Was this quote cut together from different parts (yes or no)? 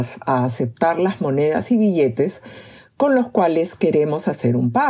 no